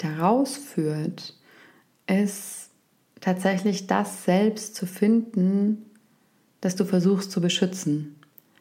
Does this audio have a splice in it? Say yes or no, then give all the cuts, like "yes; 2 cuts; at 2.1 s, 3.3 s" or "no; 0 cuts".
no; 0 cuts